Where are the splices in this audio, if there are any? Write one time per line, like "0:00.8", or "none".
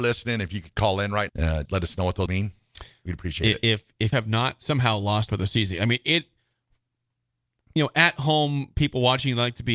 0:01.3
0:01.7
0:02.3
0:04.1
0:05.3